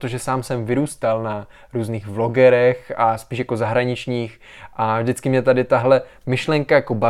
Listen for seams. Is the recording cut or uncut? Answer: uncut